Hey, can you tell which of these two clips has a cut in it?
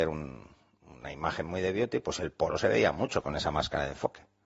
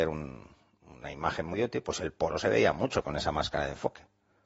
second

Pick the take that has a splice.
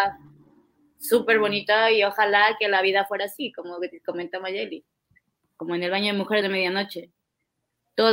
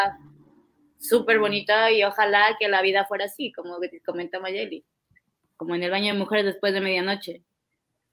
first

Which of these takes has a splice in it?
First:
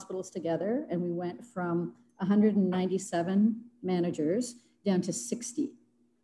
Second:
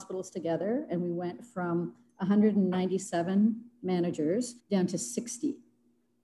second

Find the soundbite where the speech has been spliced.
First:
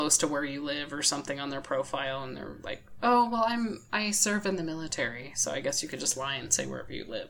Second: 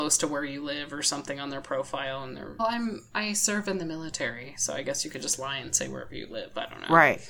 second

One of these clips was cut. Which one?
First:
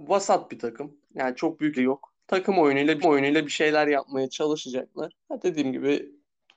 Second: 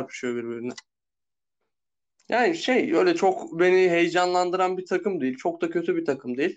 first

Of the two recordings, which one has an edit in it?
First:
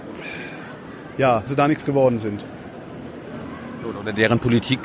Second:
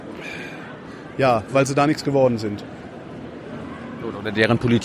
first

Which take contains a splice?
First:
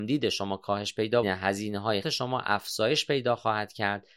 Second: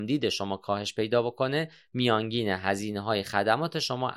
first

